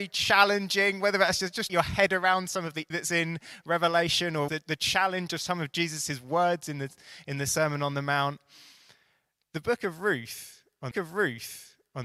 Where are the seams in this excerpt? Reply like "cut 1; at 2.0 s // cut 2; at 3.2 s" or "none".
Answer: cut 1; at 1.7 s // cut 2; at 2.9 s // cut 3; at 4.5 s // cut 4; at 10.9 s